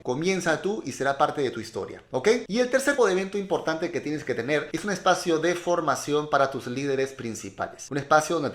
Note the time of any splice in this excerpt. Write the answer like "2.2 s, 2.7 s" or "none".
3.0 s